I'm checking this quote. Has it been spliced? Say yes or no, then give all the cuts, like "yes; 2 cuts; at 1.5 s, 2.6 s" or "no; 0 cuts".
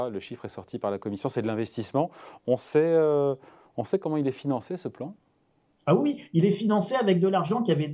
no; 0 cuts